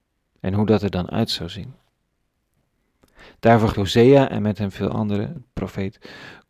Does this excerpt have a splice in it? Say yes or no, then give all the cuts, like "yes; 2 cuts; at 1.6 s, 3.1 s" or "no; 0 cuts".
yes; 1 cut; at 3.7 s